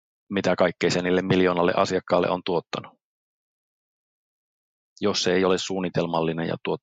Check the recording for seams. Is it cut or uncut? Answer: uncut